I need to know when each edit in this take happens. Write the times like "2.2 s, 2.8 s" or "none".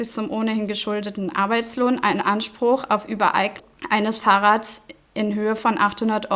none